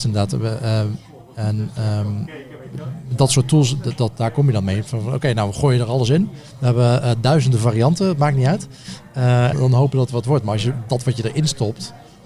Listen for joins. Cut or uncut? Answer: cut